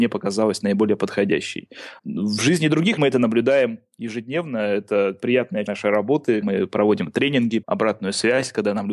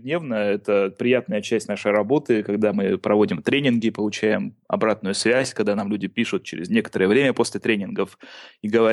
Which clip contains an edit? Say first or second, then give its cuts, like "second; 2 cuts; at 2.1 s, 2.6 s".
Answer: first; 5 cuts; at 2.0 s, 3.0 s, 5.7 s, 6.4 s, 7.6 s